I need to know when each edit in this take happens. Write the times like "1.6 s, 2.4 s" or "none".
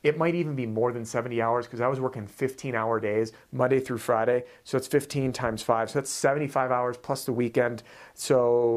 none